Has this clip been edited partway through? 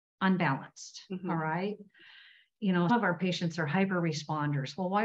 yes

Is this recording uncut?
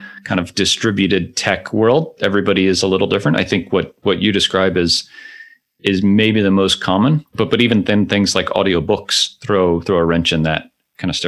yes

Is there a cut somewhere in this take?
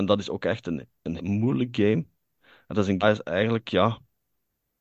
yes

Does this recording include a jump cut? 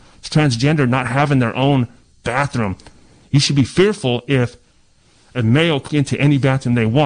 yes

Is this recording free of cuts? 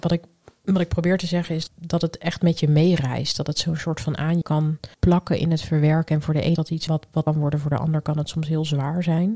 no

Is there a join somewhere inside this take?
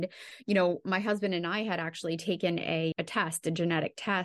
yes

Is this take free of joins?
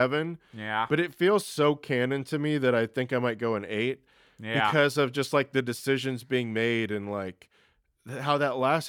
yes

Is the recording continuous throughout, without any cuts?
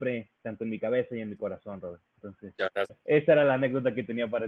no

